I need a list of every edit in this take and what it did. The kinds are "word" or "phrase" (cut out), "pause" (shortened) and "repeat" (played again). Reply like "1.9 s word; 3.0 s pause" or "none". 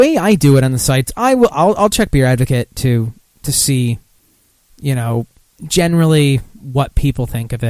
none